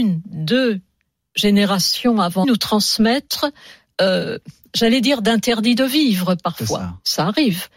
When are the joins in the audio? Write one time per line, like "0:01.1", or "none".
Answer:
0:02.4